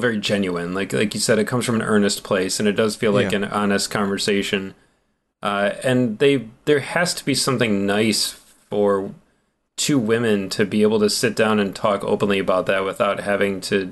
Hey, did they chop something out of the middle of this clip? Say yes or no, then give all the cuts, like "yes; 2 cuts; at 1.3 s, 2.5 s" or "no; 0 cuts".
no; 0 cuts